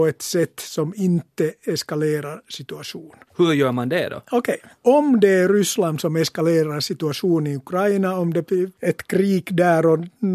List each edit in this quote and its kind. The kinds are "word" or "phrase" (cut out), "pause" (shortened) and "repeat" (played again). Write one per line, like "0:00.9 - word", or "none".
0:03.3 - pause
0:04.8 - pause